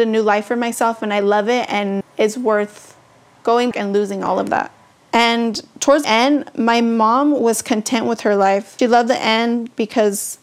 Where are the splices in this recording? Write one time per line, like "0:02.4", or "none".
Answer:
0:02.0
0:03.7
0:06.0
0:08.8